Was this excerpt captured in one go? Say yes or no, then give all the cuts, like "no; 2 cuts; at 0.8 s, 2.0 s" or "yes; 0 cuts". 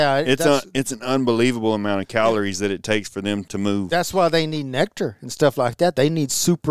no; 1 cut; at 3.4 s